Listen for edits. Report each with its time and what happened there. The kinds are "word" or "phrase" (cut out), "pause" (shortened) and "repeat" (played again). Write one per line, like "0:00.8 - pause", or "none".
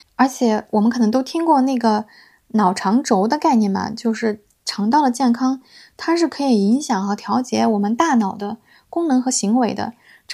none